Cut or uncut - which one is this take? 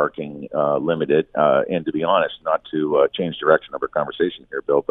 uncut